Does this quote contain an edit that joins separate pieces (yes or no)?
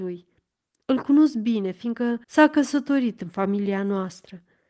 yes